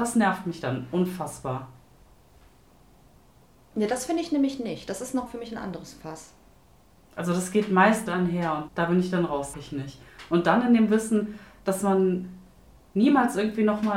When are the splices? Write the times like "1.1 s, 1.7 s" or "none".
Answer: 5.3 s, 8.1 s, 8.7 s, 9.5 s